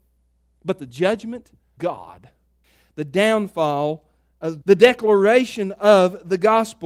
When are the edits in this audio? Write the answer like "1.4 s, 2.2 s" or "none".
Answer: 1.8 s, 4.6 s